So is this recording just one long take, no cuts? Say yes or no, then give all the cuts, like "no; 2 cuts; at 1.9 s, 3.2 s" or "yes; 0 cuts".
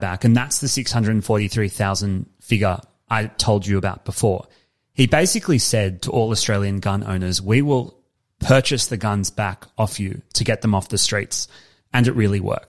yes; 0 cuts